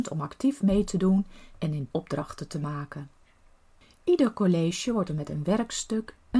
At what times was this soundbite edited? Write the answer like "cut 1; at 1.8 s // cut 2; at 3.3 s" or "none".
cut 1; at 1.9 s // cut 2; at 5.1 s

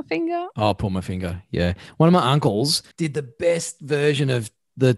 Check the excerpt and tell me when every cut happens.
cut 1; at 2.9 s

